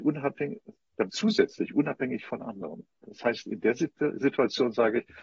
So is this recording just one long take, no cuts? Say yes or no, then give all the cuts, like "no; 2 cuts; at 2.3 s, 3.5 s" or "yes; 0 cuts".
no; 1 cut; at 1.1 s